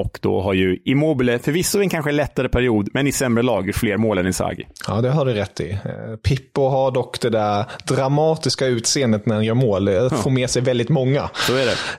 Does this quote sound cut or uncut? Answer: cut